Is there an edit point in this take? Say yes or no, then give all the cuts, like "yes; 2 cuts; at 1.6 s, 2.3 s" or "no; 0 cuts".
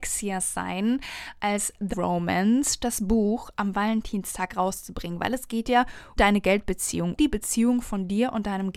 yes; 3 cuts; at 1.9 s, 6.2 s, 7.2 s